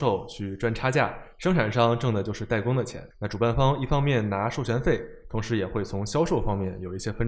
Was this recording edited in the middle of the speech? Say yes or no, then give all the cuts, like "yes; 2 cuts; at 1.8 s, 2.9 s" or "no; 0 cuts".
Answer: yes; 1 cut; at 3.1 s